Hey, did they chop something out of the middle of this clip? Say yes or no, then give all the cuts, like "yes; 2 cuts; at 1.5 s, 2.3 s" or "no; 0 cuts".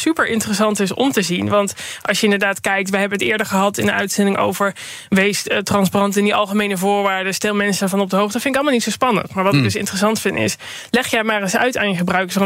no; 0 cuts